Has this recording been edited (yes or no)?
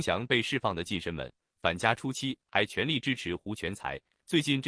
no